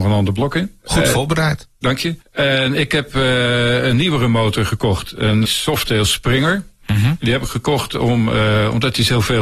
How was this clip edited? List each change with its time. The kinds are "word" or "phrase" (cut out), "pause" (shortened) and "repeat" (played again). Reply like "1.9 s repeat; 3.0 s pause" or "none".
2.2 s pause; 5.5 s word

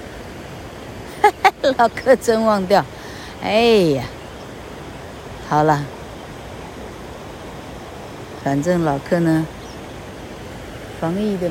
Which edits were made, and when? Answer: 8.4 s phrase

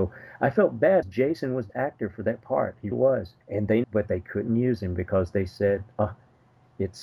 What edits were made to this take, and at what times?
1.0 s word; 1.7 s word; 2.9 s word; 3.4 s pause; 3.8 s phrase

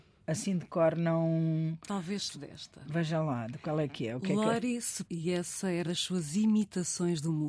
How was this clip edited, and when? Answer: 2.3 s word; 5.0 s word; 5.8 s word

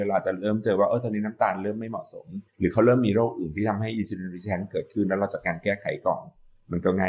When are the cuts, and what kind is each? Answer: 2.5 s pause

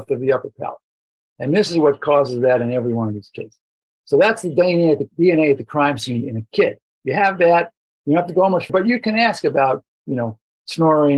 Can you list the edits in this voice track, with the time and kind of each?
8.7 s word

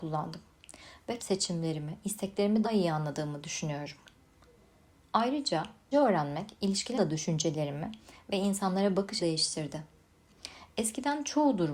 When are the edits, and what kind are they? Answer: 1.2 s word; 2.6 s word; 5.9 s word; 7.0 s word; 9.2 s word

